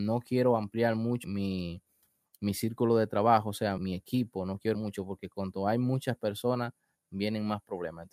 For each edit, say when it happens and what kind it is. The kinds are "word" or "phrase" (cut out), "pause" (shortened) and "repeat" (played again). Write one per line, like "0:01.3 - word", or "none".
0:01.2 - word
0:03.8 - word
0:04.7 - word